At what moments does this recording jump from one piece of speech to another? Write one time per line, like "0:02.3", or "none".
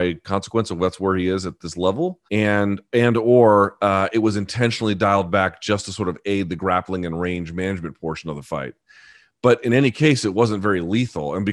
0:02.3